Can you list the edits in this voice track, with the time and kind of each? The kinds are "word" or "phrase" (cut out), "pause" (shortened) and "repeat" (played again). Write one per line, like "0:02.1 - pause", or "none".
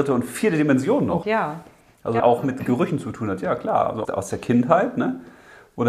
0:01.2 - word
0:02.2 - phrase
0:04.0 - word